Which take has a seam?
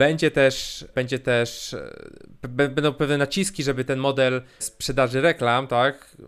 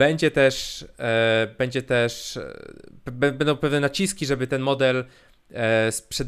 first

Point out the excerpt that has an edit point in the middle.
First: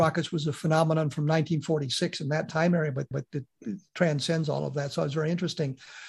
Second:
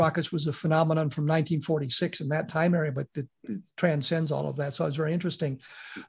first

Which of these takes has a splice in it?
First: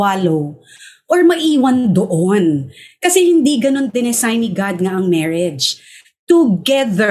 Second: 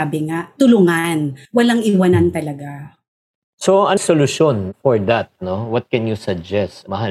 second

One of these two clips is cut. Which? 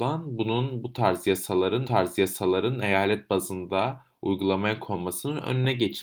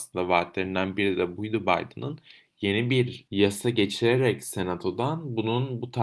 first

